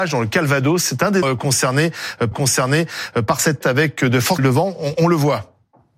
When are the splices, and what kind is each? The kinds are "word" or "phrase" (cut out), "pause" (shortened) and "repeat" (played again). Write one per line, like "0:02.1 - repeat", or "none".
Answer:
0:01.2 - word
0:02.3 - repeat
0:03.6 - word
0:04.4 - word

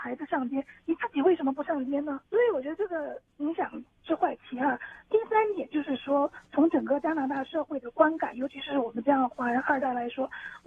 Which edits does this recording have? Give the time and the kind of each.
0:02.3 - pause
0:03.9 - pause

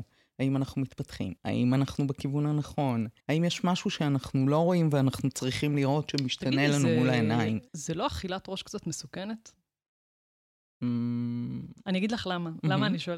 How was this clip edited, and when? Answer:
0:01.4 - pause
0:03.2 - pause
0:07.7 - pause

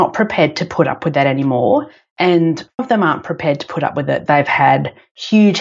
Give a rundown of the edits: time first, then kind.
0:02.8 - word
0:04.3 - word

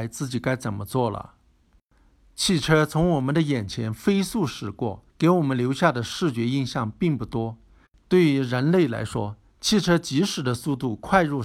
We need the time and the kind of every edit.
0:05.1 - pause

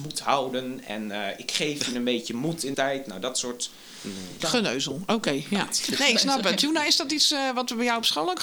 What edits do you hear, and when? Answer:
0:02.7 - word
0:04.4 - word

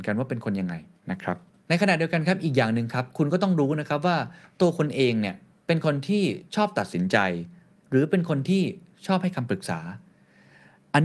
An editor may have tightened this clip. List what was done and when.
0:06.5 - pause

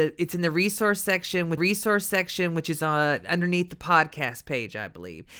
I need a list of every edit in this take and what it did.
0:01.6 - repeat

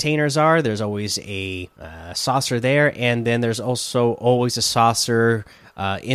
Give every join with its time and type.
0:01.7 - pause

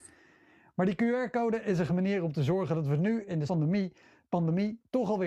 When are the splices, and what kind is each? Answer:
0:01.9 - word
0:03.5 - word

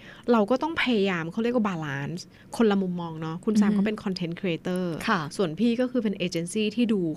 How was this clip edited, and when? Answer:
none

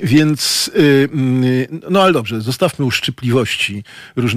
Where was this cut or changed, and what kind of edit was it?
none

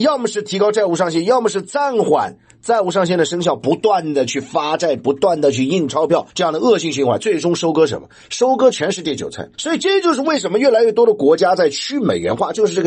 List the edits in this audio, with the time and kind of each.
0:06.3 - pause
0:09.5 - pause

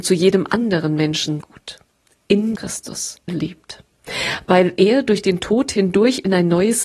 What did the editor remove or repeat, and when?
0:01.4 - phrase
0:02.6 - word
0:03.3 - phrase

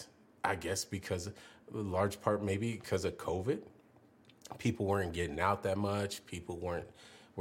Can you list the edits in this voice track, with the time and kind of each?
none

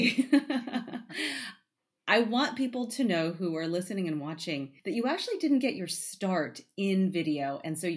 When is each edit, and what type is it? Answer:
0:04.8 - pause

